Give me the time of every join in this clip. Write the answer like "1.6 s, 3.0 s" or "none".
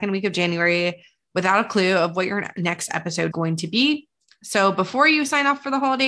3.3 s